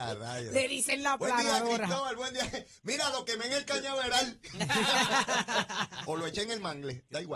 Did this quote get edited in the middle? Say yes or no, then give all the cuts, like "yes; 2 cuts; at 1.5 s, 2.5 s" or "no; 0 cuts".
no; 0 cuts